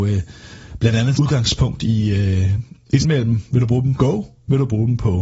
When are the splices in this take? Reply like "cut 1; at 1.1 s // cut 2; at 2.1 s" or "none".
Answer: cut 1; at 1.1 s // cut 2; at 3.0 s // cut 3; at 3.9 s